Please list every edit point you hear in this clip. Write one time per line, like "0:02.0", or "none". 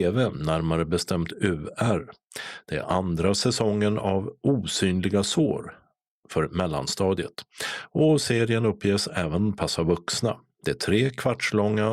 none